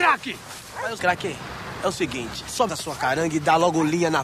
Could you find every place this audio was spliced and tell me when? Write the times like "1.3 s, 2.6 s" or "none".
1.0 s, 2.7 s